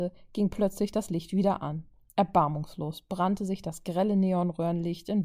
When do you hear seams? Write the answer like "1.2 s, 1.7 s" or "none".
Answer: none